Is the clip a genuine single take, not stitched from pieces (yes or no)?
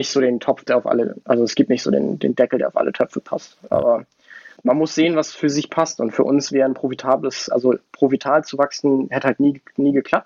yes